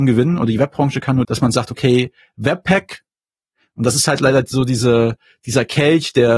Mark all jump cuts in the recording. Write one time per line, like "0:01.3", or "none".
0:01.2